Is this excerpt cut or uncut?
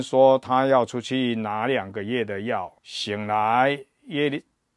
cut